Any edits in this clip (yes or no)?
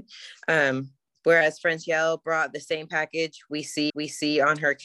yes